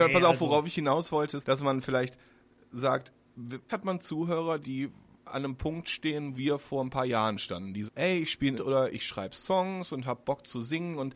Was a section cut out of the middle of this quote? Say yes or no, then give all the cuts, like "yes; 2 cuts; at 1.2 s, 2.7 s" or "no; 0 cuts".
yes; 6 cuts; at 1.4 s, 3.7 s, 4.6 s, 6.3 s, 7.9 s, 8.6 s